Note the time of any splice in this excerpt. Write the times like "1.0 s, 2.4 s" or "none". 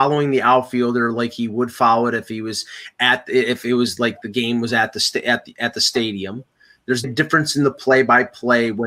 7.0 s